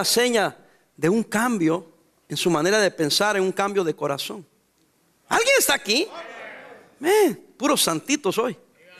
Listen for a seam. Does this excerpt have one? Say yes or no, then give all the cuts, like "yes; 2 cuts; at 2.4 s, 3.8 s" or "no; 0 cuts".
no; 0 cuts